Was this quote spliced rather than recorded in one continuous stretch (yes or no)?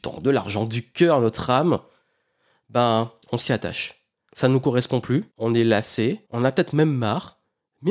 yes